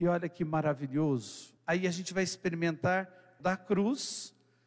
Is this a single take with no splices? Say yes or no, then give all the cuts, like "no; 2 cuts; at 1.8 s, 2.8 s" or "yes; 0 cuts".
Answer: no; 2 cuts; at 1.6 s, 3.4 s